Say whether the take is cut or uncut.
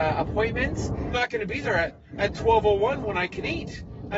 cut